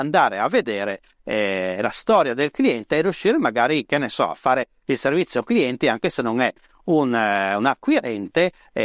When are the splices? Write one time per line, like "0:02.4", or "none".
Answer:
none